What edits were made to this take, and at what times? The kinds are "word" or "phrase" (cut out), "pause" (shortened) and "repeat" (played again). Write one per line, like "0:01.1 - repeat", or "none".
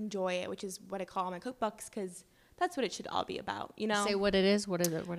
none